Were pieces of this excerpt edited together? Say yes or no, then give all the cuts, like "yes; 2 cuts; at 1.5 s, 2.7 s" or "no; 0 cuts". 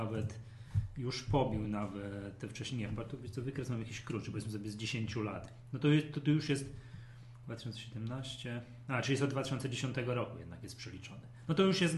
no; 0 cuts